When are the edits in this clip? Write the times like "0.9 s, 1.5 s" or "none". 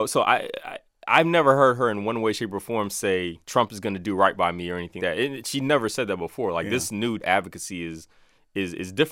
3.4 s, 5.0 s, 7.2 s